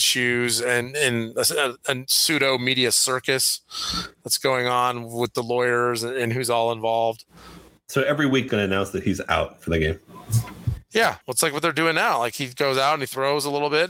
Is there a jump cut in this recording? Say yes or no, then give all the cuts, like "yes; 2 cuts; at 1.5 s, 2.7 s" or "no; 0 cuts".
yes; 2 cuts; at 8.5 s, 11.2 s